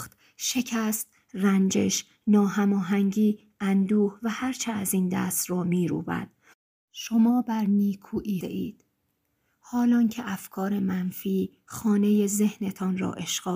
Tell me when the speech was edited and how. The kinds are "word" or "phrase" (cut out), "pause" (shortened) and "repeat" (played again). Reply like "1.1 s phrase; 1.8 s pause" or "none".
8.4 s phrase